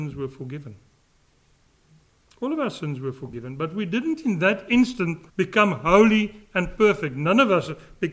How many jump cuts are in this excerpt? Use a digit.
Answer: 1